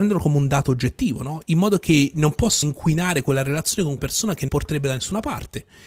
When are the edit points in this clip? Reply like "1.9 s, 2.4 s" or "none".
2.6 s, 4.0 s, 4.5 s